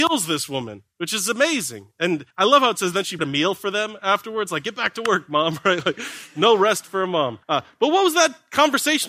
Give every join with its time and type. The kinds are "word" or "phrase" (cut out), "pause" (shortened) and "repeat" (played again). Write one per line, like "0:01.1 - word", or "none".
0:02.3 - pause
0:03.2 - word
0:07.4 - pause

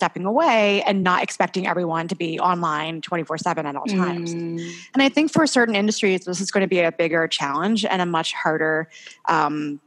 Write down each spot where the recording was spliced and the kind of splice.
none

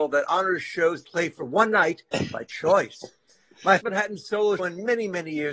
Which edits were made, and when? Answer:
0:01.0 - word
0:03.8 - word
0:04.6 - word

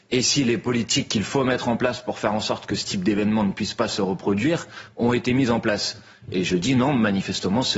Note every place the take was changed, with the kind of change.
none

